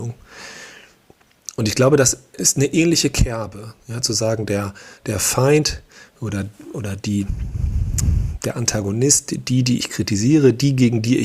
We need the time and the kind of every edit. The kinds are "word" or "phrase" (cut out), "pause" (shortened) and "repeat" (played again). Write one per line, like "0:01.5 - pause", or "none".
none